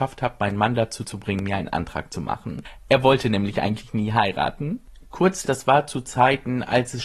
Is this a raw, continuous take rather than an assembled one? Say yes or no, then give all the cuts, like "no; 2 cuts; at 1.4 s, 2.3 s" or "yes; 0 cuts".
no; 1 cut; at 5.4 s